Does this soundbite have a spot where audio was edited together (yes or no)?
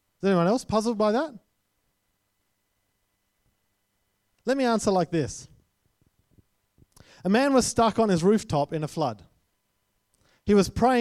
no